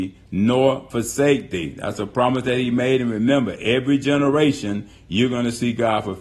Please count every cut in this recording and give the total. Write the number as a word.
zero